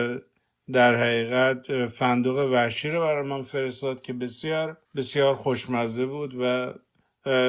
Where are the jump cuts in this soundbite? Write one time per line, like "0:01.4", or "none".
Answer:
0:04.8